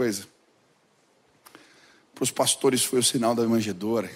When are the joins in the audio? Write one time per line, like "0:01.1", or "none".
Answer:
none

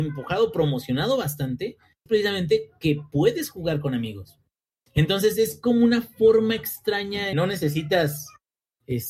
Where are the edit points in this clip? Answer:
0:02.1
0:04.7
0:07.3

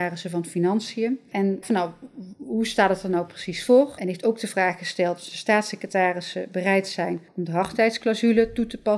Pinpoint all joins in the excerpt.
0:01.6
0:07.3

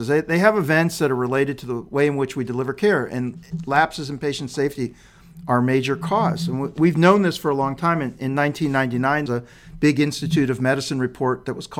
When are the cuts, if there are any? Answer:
0:09.3

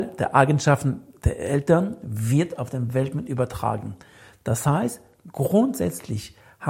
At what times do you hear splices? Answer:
none

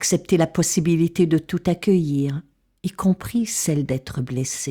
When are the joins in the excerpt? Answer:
none

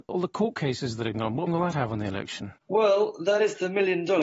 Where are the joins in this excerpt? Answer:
0:01.1
0:01.5
0:02.6

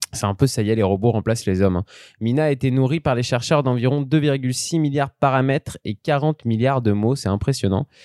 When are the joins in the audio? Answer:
none

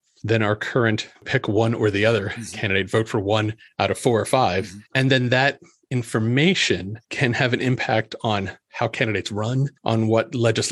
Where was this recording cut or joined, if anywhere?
0:01.1
0:03.7
0:04.9
0:07.0
0:09.8

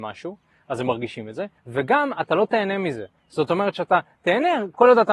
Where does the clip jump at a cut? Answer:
0:01.6

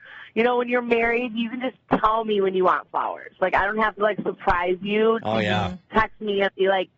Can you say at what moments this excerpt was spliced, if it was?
none

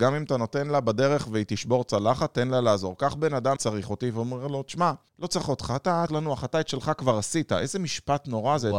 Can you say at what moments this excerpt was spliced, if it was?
0:03.6
0:05.1
0:06.1

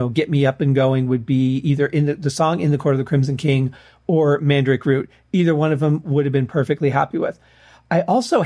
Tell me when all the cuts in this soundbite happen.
none

